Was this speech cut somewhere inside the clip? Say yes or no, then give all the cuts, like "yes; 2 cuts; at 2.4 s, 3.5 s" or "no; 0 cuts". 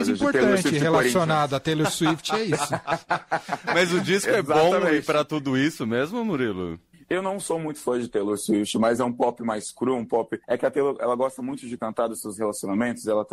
yes; 2 cuts; at 6.9 s, 10.4 s